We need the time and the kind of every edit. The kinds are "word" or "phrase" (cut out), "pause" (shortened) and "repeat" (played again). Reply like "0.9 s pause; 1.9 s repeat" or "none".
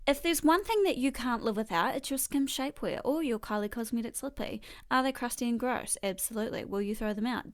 none